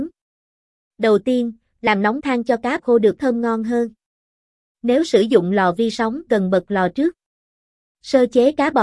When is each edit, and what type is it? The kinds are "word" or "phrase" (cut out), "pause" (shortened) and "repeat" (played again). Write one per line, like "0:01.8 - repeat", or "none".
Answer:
0:02.2 - word
0:02.8 - word
0:03.2 - word
0:06.3 - word